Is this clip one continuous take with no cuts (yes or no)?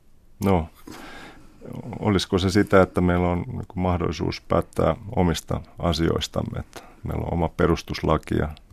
yes